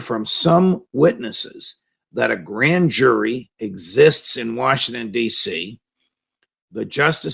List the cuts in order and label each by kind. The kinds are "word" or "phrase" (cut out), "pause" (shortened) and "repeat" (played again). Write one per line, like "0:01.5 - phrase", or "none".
0:03.5 - pause